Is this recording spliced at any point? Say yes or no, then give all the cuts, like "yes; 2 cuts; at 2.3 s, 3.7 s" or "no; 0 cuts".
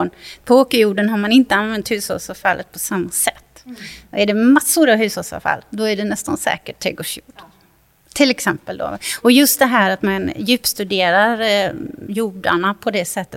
no; 0 cuts